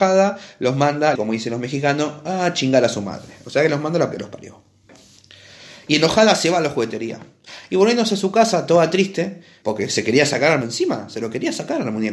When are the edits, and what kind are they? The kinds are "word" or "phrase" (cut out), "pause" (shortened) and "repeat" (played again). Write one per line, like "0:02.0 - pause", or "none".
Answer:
0:01.2 - word
0:04.1 - word
0:09.6 - word
0:10.6 - word